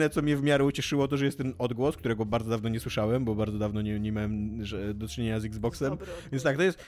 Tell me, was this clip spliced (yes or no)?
no